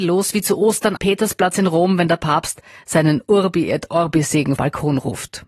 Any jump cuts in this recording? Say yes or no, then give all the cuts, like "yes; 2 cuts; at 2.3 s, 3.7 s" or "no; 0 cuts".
yes; 2 cuts; at 1.0 s, 4.6 s